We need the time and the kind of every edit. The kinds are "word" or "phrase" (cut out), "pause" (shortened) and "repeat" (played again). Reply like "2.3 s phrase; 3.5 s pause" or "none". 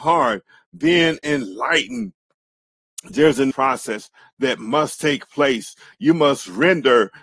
3.5 s word